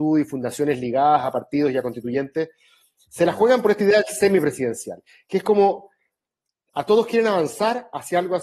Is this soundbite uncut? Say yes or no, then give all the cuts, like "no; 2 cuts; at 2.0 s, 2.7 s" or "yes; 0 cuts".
yes; 0 cuts